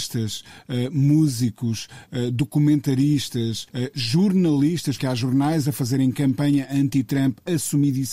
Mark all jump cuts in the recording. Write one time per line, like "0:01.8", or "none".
0:03.7
0:05.0